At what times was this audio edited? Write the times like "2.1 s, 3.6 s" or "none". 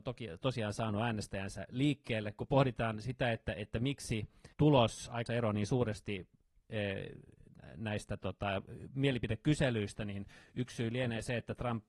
4.5 s, 5.3 s

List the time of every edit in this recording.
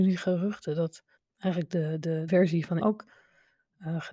1.2 s, 2.3 s, 2.8 s

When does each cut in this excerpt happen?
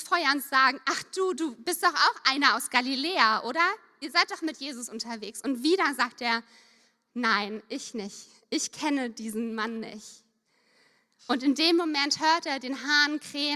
none

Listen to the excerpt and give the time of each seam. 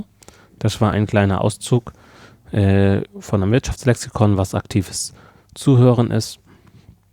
none

